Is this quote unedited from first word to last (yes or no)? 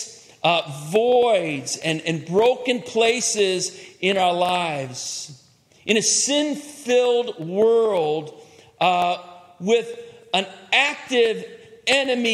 yes